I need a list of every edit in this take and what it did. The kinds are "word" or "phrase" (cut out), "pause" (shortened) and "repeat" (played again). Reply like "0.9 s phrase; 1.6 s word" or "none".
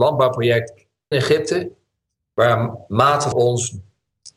1.1 s word; 3.3 s word